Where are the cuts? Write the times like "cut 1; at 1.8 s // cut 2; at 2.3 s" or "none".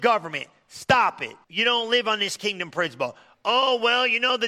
cut 1; at 1.4 s